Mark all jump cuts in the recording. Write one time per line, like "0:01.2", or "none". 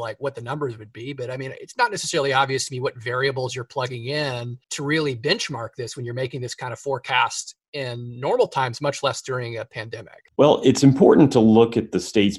0:04.6
0:10.3